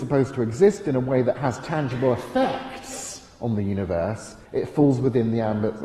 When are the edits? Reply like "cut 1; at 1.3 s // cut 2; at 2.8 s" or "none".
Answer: cut 1; at 4.4 s